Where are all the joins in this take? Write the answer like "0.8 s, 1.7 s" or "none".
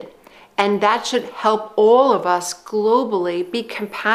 none